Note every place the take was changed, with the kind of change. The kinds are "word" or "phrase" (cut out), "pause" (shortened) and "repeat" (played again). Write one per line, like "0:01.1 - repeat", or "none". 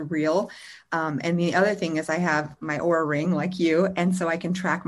none

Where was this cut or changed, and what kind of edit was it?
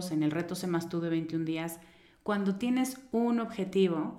none

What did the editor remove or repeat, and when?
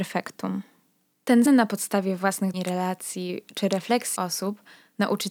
0:01.5 - word
0:02.5 - word
0:04.2 - word

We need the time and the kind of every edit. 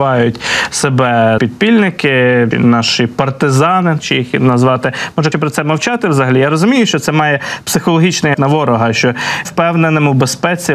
0:01.4 - word
0:02.5 - word
0:04.0 - word
0:05.3 - word
0:08.3 - word
0:09.4 - word

